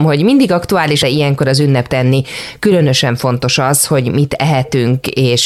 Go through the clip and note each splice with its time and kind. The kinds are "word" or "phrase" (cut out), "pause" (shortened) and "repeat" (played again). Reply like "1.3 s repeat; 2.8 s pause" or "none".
1.0 s phrase; 1.9 s phrase